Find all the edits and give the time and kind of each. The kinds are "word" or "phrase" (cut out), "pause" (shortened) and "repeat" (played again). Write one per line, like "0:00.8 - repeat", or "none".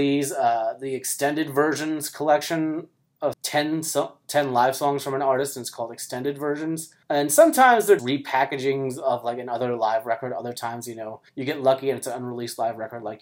0:03.3 - phrase
0:07.0 - pause
0:08.0 - word
0:11.3 - pause